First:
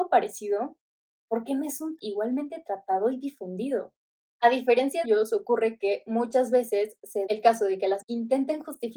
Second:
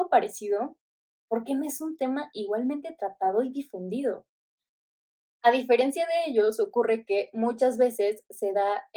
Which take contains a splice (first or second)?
first